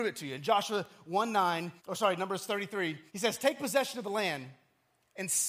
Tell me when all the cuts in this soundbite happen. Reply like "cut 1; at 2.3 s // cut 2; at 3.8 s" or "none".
cut 1; at 1.8 s // cut 2; at 3.1 s